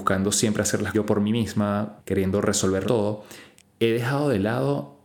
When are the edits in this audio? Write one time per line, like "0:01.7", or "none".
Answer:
0:00.9
0:02.0
0:02.8
0:03.6

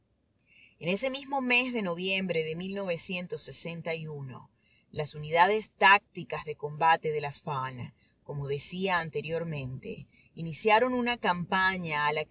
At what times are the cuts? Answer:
none

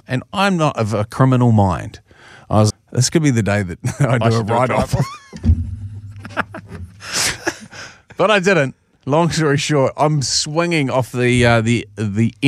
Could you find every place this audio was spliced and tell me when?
0:02.7

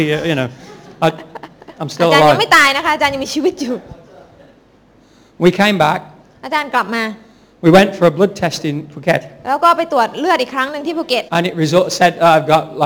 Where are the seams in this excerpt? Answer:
0:11.3

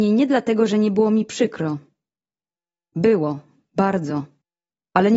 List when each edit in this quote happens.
none

